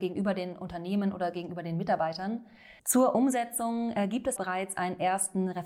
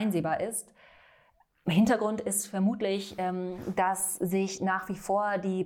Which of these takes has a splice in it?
first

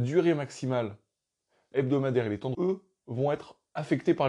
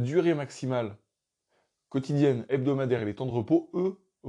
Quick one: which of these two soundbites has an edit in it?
first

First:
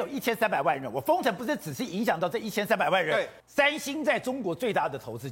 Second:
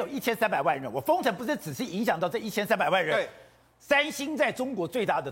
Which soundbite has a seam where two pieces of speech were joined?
first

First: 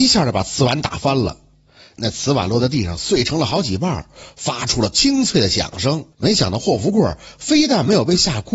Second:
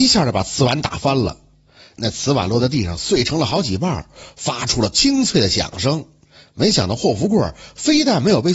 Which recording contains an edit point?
first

